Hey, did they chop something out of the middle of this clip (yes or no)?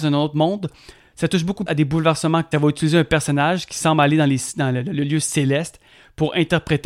yes